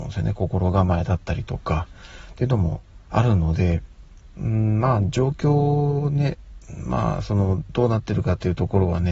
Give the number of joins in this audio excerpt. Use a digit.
0